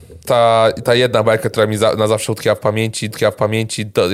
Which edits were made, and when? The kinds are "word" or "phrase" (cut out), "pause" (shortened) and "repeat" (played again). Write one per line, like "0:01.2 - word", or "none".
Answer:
0:03.1 - repeat